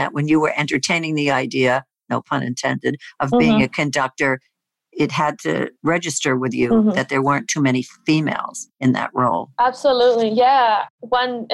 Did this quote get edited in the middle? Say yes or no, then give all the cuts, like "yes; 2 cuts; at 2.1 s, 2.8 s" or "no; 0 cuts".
yes; 1 cut; at 5.7 s